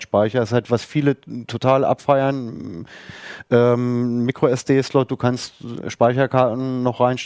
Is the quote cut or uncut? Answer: uncut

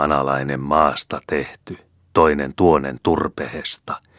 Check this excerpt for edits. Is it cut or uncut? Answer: uncut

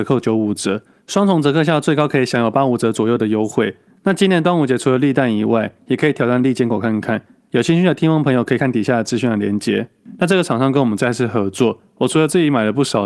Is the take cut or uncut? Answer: uncut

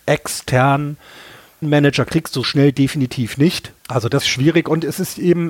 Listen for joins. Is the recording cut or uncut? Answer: cut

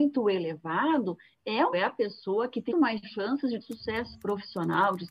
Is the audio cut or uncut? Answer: cut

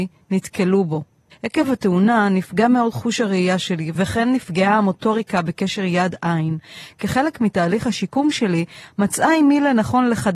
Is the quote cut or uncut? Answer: uncut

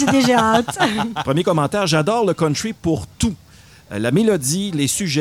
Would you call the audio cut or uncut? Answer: uncut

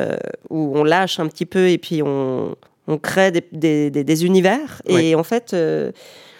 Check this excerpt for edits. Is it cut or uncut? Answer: cut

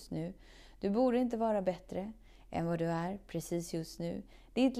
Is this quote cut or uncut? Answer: uncut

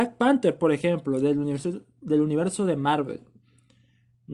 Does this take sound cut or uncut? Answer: uncut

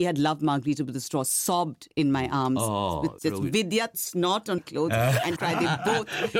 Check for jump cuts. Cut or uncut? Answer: cut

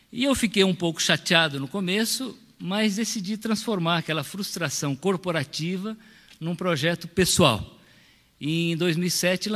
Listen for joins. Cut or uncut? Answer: uncut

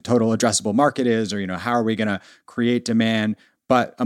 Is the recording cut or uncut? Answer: uncut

